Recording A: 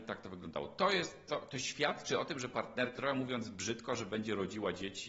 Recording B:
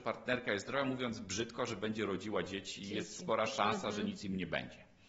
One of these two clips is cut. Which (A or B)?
A